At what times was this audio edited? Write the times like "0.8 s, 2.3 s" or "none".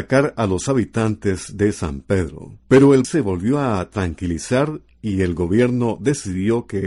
2.6 s, 3.0 s